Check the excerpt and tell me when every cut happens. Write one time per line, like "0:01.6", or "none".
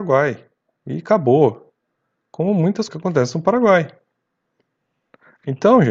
0:02.9